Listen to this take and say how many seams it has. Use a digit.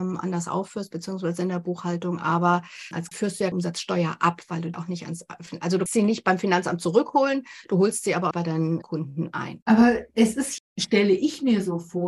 7